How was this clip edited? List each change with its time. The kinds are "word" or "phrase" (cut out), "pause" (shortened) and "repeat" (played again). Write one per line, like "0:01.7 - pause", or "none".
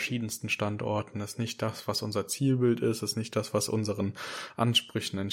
none